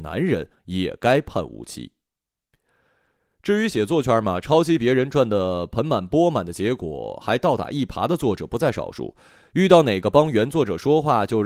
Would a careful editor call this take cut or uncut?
uncut